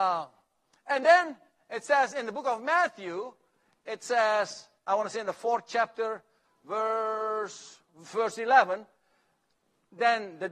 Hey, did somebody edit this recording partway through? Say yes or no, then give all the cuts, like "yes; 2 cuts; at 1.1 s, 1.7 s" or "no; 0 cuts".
no; 0 cuts